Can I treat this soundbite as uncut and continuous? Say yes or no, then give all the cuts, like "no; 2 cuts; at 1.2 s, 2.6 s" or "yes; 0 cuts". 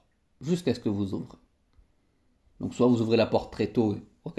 yes; 0 cuts